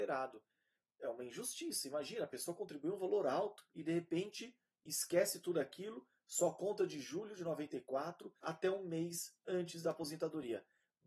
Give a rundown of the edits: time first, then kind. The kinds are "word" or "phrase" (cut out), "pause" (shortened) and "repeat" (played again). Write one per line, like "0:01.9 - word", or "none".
0:08.4 - pause